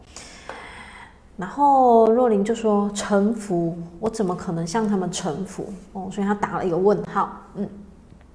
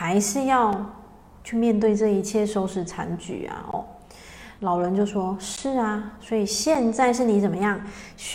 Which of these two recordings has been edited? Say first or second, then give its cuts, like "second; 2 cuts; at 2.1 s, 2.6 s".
second; 2 cuts; at 4.6 s, 6.2 s